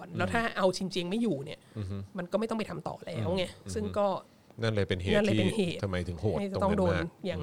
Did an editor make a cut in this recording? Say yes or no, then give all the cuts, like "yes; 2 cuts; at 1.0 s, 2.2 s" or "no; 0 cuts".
yes; 1 cut; at 4.5 s